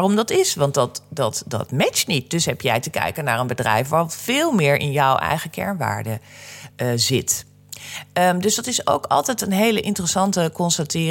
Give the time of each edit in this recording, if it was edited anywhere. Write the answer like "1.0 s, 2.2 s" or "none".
none